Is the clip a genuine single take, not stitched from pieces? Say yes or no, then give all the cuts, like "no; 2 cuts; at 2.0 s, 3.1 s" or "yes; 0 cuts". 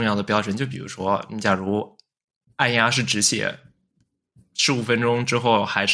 yes; 0 cuts